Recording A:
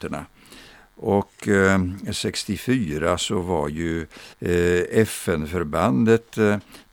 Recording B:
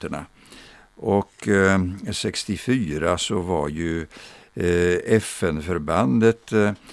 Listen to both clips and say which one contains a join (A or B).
A